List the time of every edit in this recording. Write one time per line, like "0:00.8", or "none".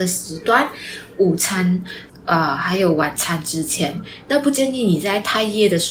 none